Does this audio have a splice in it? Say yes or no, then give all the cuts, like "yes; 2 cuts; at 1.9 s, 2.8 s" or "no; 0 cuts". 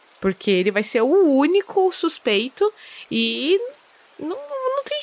no; 0 cuts